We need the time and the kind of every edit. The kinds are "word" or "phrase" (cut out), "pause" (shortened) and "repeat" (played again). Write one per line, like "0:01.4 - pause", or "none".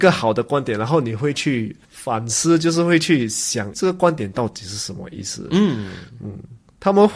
0:01.8 - pause
0:03.7 - word